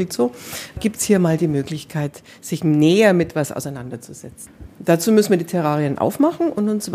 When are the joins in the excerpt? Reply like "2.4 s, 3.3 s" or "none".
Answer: none